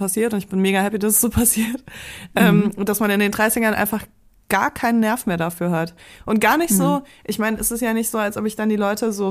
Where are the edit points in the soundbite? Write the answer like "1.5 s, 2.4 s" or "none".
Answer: none